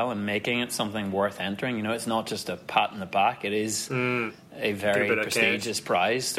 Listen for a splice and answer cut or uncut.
uncut